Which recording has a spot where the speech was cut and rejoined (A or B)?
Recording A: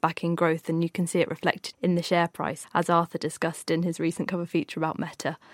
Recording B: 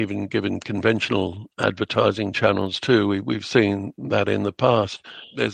A